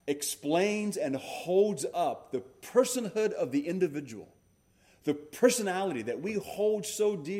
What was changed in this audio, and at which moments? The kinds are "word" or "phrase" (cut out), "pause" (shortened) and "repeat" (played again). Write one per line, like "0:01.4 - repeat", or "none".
none